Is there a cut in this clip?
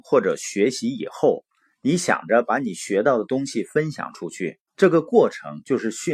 no; 0 cuts

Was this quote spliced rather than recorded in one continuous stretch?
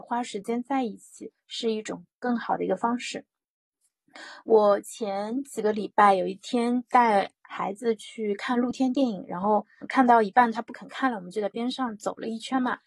yes; 1 cut; at 9.8 s

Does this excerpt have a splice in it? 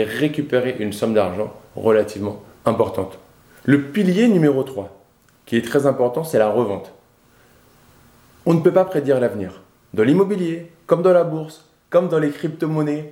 no; 0 cuts

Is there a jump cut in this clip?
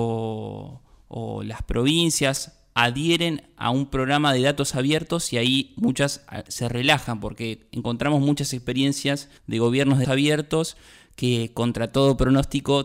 yes; 2 cuts; at 9.4 s, 10.0 s

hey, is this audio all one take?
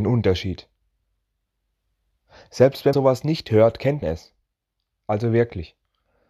no; 2 cuts; at 2.9 s, 4.0 s

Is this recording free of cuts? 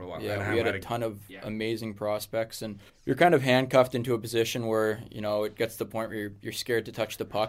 no; 1 cut; at 2.9 s

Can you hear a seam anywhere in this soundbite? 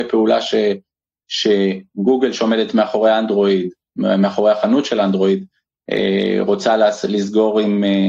no; 0 cuts

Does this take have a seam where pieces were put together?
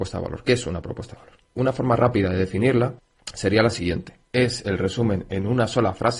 yes; 2 cuts; at 1.5 s, 4.2 s

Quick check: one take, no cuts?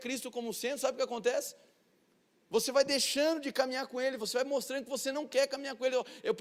yes; 0 cuts

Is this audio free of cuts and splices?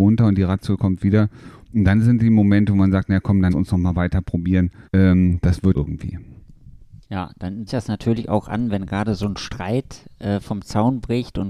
no; 5 cuts; at 3.5 s, 4.8 s, 5.7 s, 7.0 s, 7.7 s

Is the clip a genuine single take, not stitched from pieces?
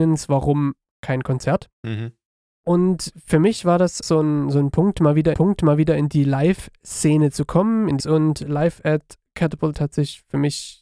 no; 5 cuts; at 1.7 s, 4.0 s, 5.3 s, 8.0 s, 9.7 s

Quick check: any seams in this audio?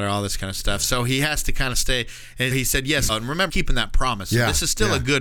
yes; 3 cuts; at 2.5 s, 3.1 s, 3.5 s

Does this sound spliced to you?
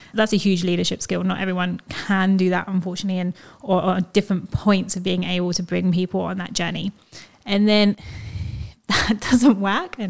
no; 0 cuts

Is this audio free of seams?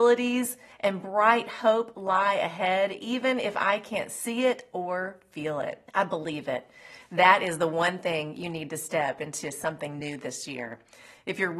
no; 1 cut; at 5.9 s

